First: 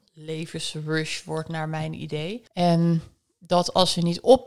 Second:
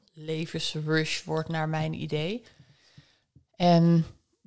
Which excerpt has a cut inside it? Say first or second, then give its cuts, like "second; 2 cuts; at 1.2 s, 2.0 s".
first; 1 cut; at 2.5 s